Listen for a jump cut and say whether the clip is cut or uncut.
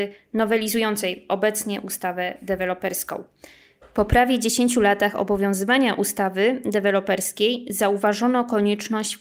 uncut